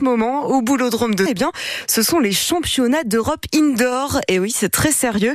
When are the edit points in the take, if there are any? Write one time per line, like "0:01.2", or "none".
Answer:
0:01.3